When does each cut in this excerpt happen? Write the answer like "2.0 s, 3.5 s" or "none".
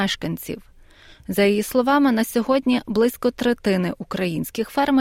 none